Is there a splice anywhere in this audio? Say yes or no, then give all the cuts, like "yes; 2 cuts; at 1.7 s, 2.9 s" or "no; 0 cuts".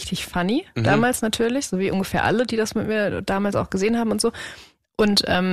no; 0 cuts